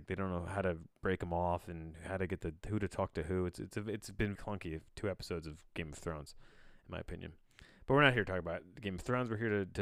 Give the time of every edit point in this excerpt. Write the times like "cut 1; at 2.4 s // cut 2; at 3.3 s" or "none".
cut 1; at 4.3 s